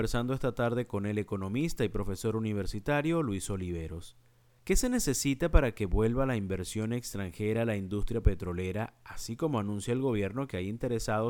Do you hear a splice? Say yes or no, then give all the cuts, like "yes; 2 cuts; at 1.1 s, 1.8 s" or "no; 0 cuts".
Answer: no; 0 cuts